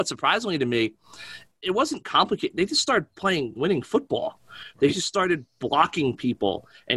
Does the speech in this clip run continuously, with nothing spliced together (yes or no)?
yes